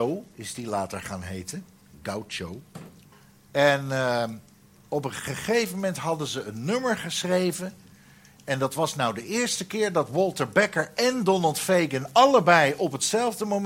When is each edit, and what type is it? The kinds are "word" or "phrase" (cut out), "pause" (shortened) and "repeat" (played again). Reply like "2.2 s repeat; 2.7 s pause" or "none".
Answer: none